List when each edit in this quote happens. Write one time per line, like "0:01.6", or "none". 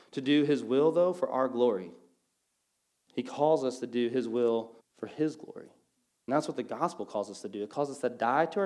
0:04.8